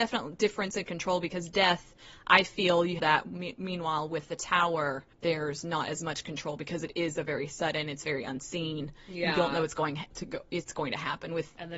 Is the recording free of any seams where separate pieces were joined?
no; 2 cuts; at 3.0 s, 5.1 s

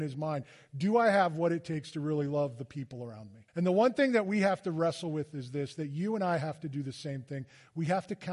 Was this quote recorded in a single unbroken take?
no; 1 cut; at 3.5 s

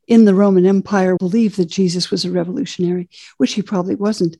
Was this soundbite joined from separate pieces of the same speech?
yes; 1 cut; at 1.2 s

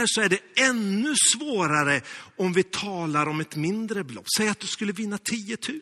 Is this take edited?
no; 0 cuts

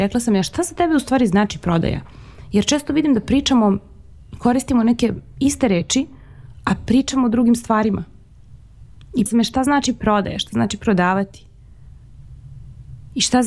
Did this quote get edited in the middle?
yes; 1 cut; at 9.3 s

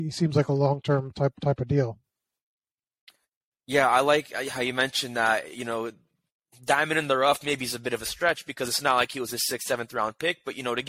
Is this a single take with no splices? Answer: yes; 0 cuts

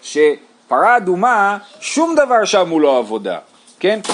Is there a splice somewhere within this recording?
no; 0 cuts

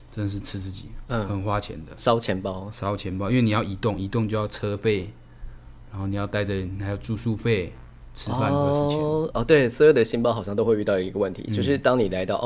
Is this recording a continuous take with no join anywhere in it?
yes; 0 cuts

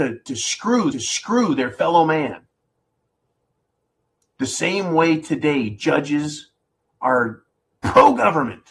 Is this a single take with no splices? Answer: no; 1 cut; at 0.9 s

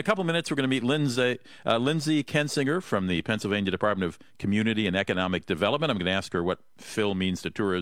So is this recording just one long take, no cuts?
yes; 0 cuts

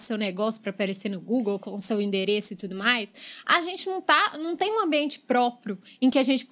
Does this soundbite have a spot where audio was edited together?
no; 0 cuts

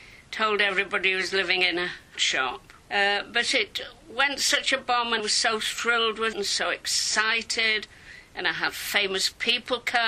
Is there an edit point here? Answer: yes; 5 cuts; at 2.2 s, 2.8 s, 4.0 s, 5.2 s, 6.3 s

